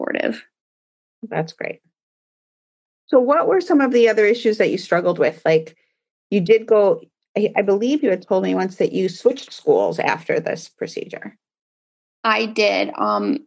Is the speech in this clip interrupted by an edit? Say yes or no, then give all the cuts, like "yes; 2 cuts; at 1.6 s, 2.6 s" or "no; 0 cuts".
no; 0 cuts